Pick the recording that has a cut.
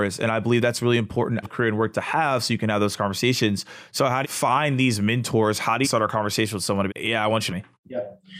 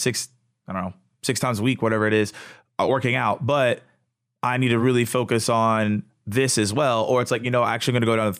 first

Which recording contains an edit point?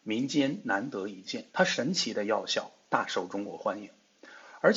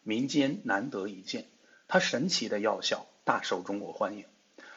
first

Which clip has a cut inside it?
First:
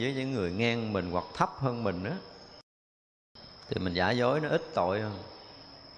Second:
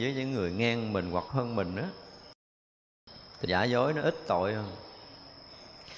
second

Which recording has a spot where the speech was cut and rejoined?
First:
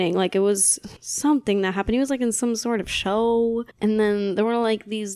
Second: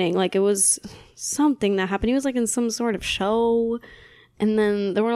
first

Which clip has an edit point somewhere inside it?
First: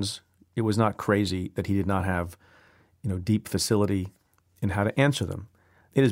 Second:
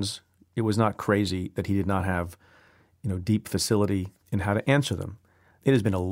second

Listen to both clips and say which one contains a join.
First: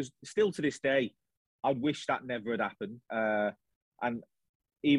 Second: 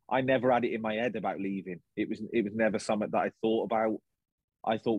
first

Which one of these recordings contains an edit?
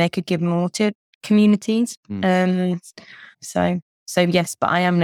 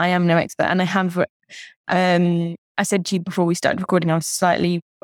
first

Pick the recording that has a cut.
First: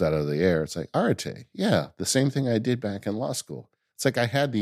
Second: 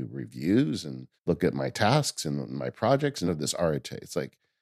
second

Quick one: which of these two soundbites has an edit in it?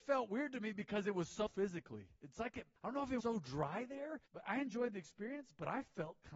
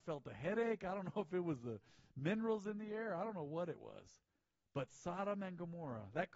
first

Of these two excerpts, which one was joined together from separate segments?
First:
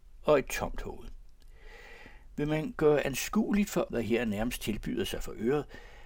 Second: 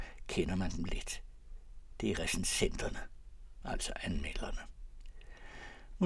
first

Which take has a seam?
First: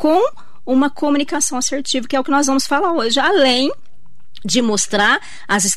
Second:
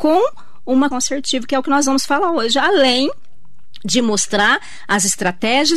second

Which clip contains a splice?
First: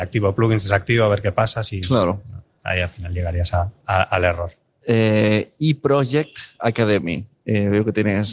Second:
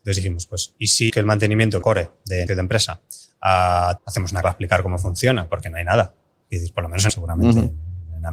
second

